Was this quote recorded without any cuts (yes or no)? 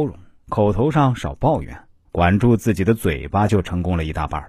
no